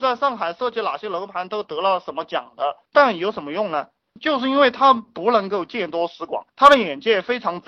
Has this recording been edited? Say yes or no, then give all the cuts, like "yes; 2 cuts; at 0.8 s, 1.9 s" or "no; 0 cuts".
yes; 2 cuts; at 2.9 s, 6.5 s